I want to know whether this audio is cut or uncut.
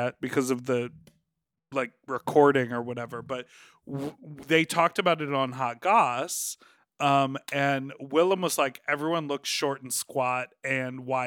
uncut